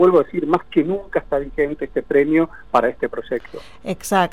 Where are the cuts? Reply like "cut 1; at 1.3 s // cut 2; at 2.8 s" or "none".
none